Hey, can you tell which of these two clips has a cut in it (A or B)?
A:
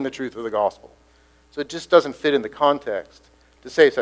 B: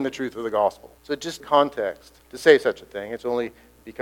B